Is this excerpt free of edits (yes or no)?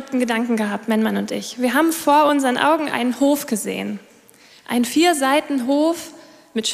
yes